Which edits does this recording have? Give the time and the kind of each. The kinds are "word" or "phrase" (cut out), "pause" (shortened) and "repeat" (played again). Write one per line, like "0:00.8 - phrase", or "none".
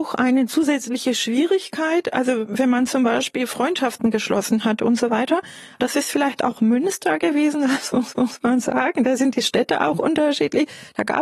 0:08.2 - repeat